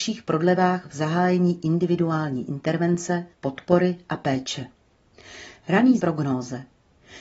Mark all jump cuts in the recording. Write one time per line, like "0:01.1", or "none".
0:03.3
0:06.0